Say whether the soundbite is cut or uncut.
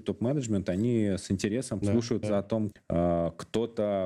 cut